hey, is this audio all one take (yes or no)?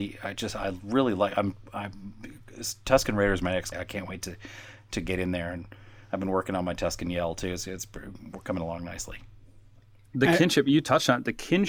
no